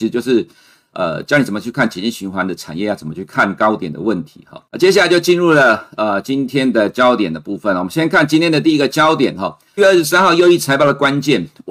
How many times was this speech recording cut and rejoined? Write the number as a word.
two